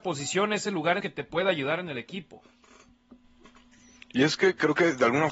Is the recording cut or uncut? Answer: cut